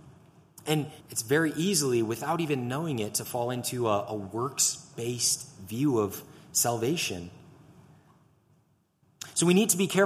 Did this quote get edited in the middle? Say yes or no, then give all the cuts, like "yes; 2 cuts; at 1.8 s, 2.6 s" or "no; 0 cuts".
yes; 1 cut; at 1.0 s